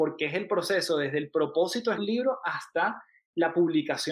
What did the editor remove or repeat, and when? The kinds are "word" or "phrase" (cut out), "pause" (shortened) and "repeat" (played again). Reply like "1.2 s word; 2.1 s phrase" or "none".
2.0 s word